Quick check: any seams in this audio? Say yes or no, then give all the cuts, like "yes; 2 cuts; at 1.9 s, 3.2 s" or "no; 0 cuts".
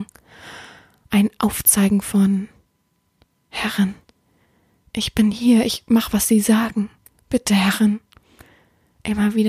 no; 0 cuts